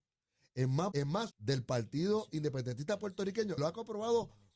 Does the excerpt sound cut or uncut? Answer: cut